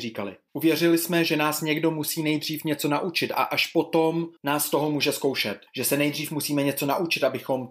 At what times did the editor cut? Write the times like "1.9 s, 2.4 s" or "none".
4.4 s, 5.7 s